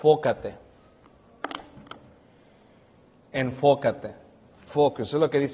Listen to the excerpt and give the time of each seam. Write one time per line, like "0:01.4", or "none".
none